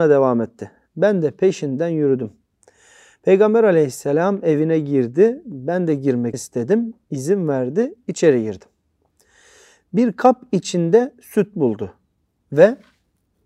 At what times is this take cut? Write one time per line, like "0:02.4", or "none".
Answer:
0:06.3